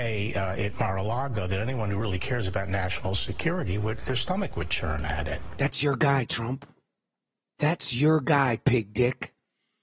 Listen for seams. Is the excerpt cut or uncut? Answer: uncut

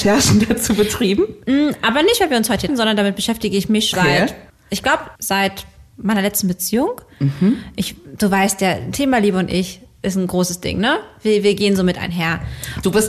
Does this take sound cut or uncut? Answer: cut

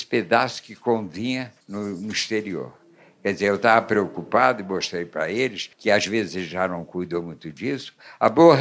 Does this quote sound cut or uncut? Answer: cut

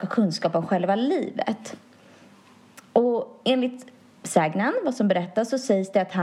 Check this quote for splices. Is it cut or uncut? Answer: uncut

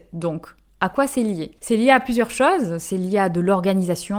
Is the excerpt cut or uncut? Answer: uncut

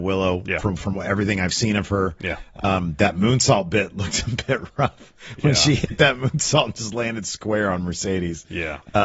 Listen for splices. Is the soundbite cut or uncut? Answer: uncut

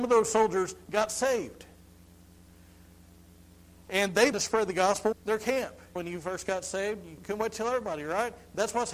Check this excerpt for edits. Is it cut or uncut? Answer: cut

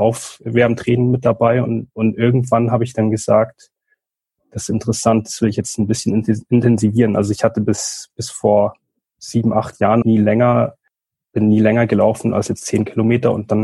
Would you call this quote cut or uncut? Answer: cut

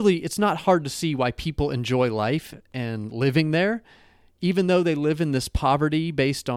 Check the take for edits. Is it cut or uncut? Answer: uncut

